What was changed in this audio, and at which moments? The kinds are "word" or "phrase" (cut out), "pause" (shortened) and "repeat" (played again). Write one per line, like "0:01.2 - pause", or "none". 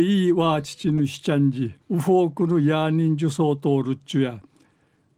0:01.8 - pause